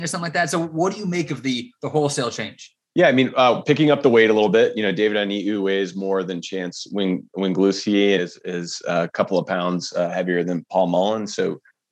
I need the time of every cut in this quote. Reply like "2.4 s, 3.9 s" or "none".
2.8 s, 8.2 s